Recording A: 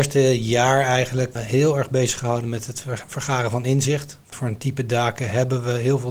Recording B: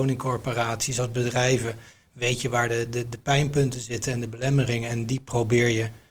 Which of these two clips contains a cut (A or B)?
A